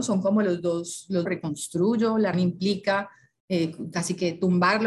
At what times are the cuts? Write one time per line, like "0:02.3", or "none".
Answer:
0:01.3
0:02.3